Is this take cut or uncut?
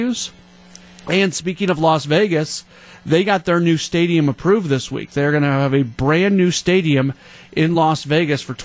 uncut